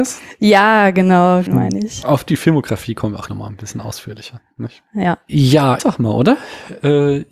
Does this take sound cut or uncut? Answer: cut